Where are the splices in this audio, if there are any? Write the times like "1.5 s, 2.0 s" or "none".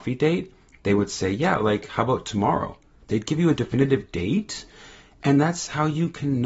none

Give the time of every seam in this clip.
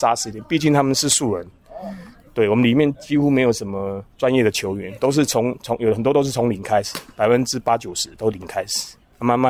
4.1 s

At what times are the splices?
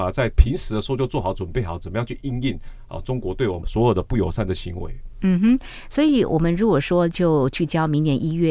none

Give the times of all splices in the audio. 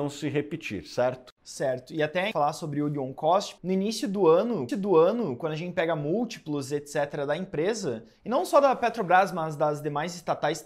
2.3 s, 3.6 s, 4.7 s

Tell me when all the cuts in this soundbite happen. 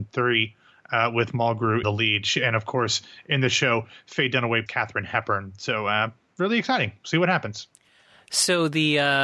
1.8 s, 4.7 s

